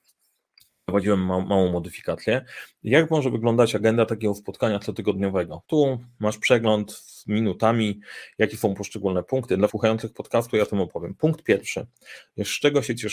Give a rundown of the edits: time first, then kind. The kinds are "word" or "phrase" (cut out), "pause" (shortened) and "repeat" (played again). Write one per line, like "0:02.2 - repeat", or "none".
0:05.6 - pause
0:09.7 - word

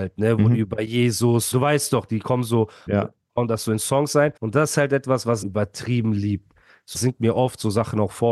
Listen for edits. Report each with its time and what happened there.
0:01.5 - word
0:02.9 - phrase
0:04.4 - pause
0:05.4 - word
0:06.9 - word

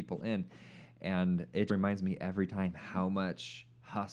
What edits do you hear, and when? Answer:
0:01.7 - word

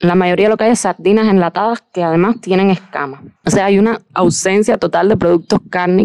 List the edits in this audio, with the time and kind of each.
0:03.4 - pause
0:04.1 - pause

